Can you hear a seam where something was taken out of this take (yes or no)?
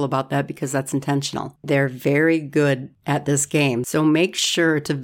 no